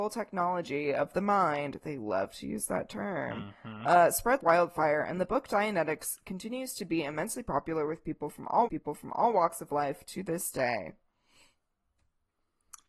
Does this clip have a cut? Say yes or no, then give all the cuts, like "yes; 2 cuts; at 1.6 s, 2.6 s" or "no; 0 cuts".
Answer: yes; 2 cuts; at 4.4 s, 8.7 s